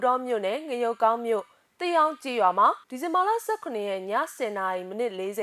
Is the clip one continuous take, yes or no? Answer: no